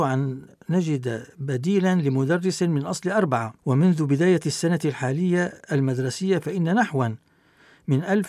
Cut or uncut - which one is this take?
cut